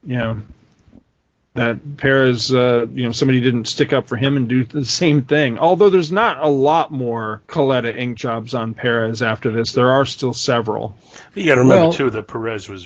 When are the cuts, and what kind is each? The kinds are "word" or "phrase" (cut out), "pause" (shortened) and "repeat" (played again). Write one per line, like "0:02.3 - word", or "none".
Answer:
0:07.5 - pause